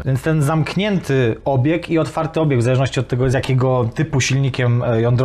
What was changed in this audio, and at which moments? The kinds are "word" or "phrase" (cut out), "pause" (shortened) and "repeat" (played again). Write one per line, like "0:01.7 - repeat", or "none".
none